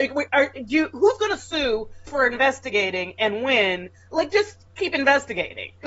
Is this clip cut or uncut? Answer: cut